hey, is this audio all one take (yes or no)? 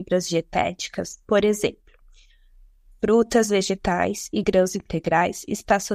yes